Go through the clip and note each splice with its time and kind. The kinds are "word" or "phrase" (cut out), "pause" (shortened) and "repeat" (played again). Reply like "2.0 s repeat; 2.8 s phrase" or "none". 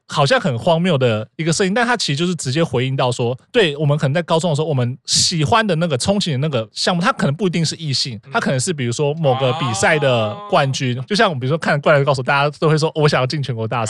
8.2 s pause